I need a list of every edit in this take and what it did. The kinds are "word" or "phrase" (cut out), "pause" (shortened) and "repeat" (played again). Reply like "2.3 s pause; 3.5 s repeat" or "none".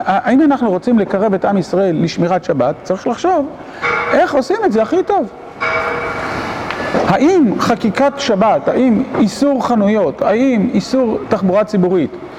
none